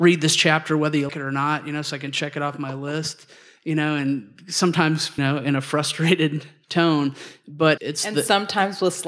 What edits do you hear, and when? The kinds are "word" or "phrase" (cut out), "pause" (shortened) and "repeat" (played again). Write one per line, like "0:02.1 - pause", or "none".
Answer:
0:01.1 - word
0:05.2 - word
0:07.8 - word